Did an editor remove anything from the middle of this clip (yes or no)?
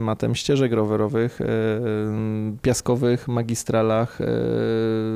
yes